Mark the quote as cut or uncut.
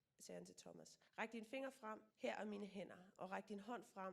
cut